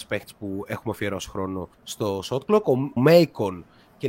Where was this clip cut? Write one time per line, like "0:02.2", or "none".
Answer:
0:01.7
0:03.0